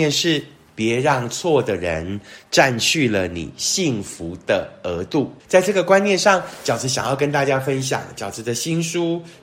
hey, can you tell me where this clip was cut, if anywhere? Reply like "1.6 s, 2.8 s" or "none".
5.4 s